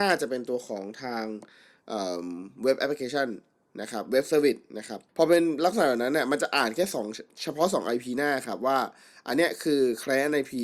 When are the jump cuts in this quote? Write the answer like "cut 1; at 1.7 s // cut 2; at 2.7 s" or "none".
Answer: cut 1; at 5.1 s